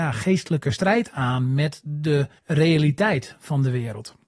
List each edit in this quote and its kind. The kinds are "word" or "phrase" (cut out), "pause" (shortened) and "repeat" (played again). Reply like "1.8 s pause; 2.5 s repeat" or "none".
2.4 s pause